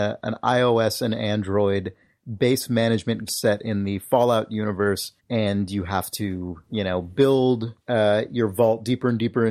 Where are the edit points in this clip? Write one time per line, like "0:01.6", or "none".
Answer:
0:03.3
0:05.2
0:06.6
0:07.8